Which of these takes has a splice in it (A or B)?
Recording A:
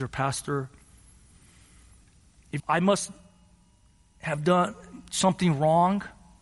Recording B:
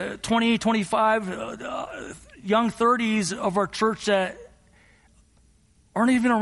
A